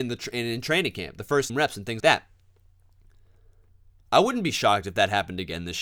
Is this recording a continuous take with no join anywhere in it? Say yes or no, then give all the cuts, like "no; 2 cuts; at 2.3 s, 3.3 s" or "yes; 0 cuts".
no; 2 cuts; at 1.5 s, 2.0 s